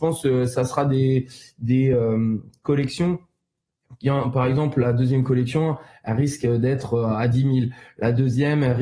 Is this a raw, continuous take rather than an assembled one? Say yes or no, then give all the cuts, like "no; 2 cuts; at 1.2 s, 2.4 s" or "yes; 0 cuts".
yes; 0 cuts